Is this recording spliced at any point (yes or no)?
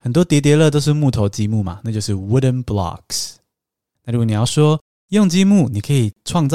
no